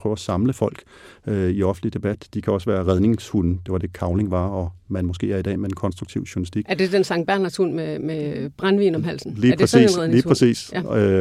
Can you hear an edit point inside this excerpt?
no; 0 cuts

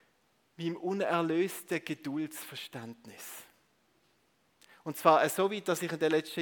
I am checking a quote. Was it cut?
no; 0 cuts

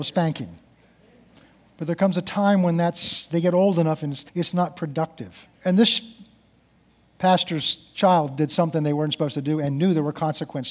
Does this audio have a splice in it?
yes; 2 cuts; at 4.3 s, 5.6 s

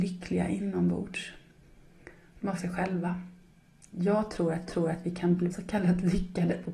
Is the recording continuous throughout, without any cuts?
no; 3 cuts; at 2.6 s, 4.7 s, 5.5 s

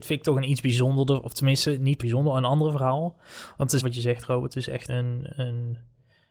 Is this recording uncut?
no; 3 cuts; at 2.0 s, 3.8 s, 4.9 s

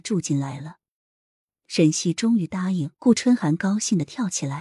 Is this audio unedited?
no; 1 cut; at 2.9 s

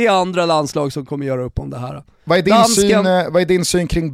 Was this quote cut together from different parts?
no; 0 cuts

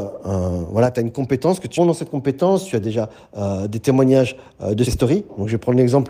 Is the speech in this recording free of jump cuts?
no; 2 cuts; at 1.8 s, 4.9 s

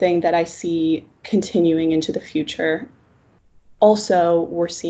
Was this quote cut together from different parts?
no; 0 cuts

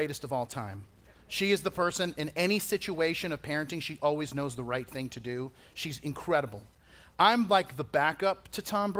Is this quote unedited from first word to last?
yes; 0 cuts

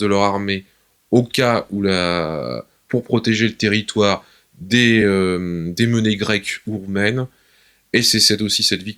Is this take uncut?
yes; 0 cuts

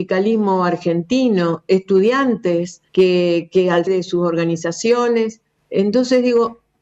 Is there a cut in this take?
yes; 3 cuts; at 2.9 s, 3.9 s, 5.6 s

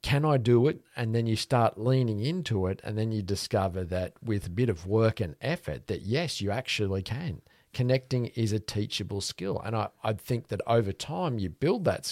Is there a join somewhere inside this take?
no; 0 cuts

